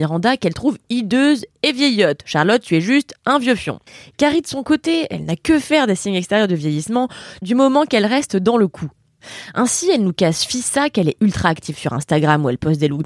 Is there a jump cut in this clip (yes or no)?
no